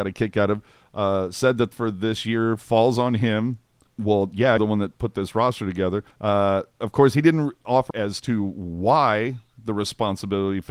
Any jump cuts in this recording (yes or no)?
yes